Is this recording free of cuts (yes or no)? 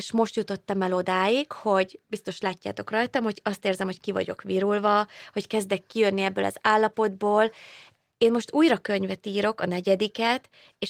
yes